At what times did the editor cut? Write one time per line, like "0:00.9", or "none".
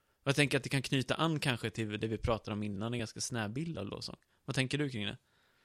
none